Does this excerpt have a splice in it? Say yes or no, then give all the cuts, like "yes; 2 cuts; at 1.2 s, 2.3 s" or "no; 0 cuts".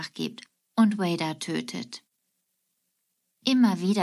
no; 0 cuts